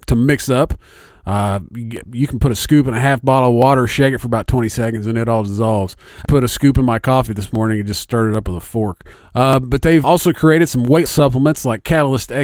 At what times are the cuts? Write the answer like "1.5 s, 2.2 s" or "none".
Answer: 6.2 s, 9.1 s, 10.0 s, 11.1 s